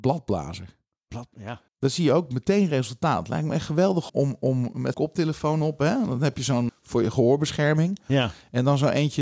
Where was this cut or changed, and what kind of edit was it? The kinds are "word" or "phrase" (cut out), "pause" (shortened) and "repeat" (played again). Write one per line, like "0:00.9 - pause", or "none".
0:01.7 - pause
0:04.1 - word
0:04.9 - word
0:06.7 - word